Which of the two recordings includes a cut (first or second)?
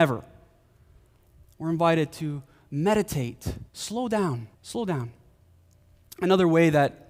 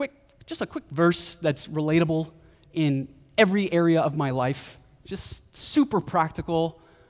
first